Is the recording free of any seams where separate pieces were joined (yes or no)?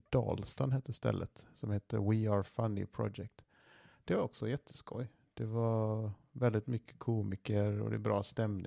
yes